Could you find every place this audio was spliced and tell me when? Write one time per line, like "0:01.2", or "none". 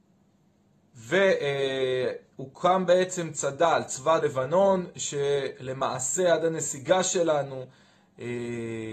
0:04.2